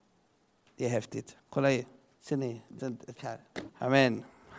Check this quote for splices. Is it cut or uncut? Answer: cut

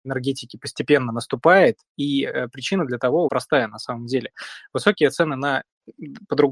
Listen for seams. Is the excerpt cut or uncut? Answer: cut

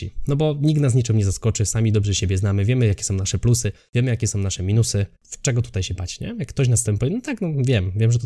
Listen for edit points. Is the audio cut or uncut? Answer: cut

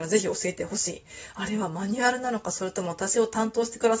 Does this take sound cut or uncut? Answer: uncut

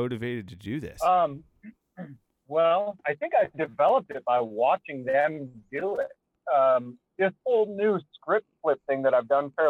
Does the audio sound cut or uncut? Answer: cut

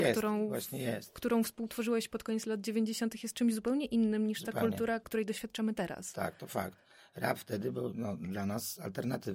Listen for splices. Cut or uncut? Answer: uncut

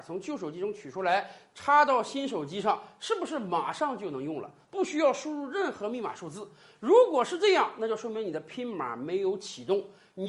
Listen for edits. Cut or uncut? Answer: uncut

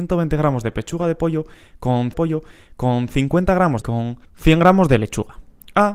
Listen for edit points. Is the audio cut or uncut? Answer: cut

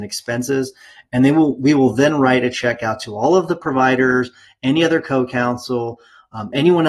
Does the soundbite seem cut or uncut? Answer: uncut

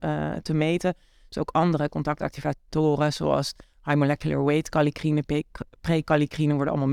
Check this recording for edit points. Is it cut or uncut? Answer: uncut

